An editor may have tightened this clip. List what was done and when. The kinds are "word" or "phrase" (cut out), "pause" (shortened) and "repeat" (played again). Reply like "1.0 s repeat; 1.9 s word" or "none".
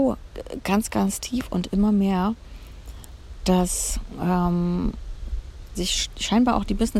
5.7 s word